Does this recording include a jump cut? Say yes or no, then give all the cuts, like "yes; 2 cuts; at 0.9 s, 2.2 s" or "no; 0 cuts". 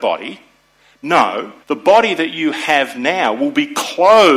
yes; 1 cut; at 1.6 s